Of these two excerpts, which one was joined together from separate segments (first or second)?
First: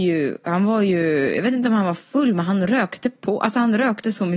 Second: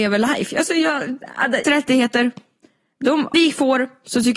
second